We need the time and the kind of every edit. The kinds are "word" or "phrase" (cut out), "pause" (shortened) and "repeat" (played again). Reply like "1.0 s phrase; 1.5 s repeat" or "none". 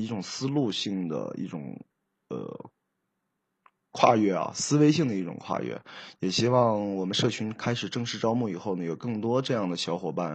none